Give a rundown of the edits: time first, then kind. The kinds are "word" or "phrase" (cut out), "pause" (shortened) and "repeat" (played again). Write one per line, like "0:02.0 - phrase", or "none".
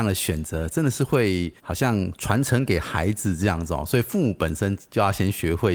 0:01.6 - pause